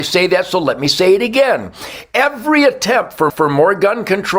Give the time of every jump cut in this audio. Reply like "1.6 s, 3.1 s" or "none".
3.3 s